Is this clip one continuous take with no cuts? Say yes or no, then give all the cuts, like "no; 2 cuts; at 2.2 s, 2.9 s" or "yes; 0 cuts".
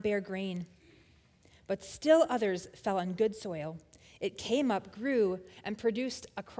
yes; 0 cuts